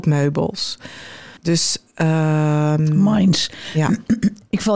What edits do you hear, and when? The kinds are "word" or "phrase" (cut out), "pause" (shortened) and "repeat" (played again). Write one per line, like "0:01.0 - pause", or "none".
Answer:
0:01.4 - pause

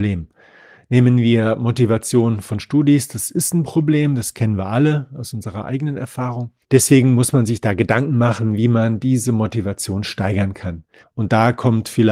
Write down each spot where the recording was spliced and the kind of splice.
0:06.6 - pause
0:11.0 - pause

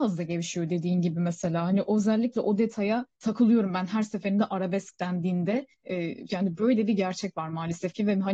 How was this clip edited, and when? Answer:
0:03.1 - pause
0:05.7 - pause

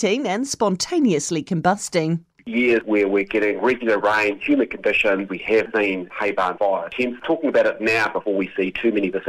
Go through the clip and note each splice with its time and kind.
none

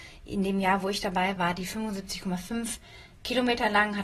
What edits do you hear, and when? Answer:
0:01.4 - word

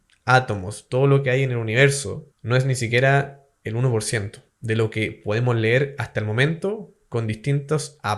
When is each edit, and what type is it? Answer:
0:02.3 - pause
0:04.5 - pause

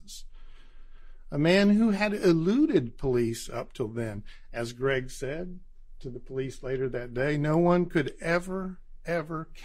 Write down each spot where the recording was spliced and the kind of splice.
none

